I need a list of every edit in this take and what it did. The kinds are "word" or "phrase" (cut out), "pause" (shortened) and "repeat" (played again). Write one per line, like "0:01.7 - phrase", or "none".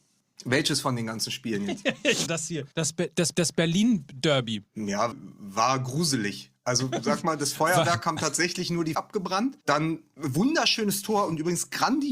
0:02.3 - word
0:02.7 - pause
0:03.3 - repeat
0:05.1 - word
0:08.9 - phrase
0:09.6 - pause

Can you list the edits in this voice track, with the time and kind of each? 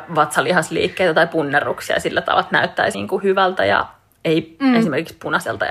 0:02.9 - word

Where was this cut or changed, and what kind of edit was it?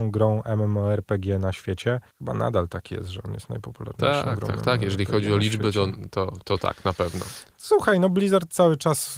0:02.1 - pause

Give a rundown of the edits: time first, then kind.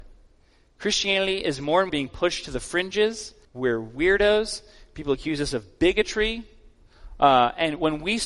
0:01.9 - word
0:03.4 - pause

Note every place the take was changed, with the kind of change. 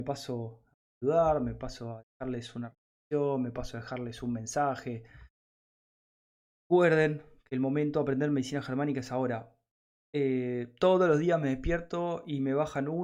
none

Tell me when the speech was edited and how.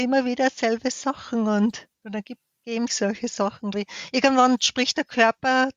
0:01.9 - pause
0:02.9 - word
0:03.7 - word

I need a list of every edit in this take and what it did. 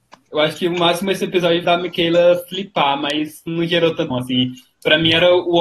0:01.6 - phrase
0:03.5 - word
0:04.1 - word

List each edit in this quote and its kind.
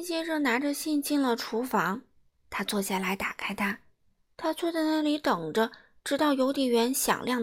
none

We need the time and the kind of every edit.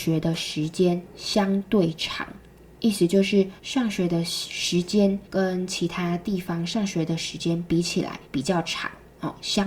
0:03.6 - pause
0:05.2 - pause
0:08.2 - pause

